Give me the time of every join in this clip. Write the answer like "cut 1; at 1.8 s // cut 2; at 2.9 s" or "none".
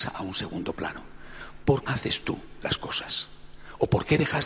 cut 1; at 1.8 s